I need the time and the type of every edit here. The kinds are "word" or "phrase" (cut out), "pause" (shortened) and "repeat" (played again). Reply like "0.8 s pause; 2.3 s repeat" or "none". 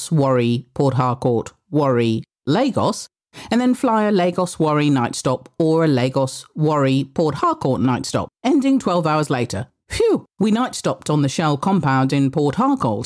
8.3 s pause; 10.3 s pause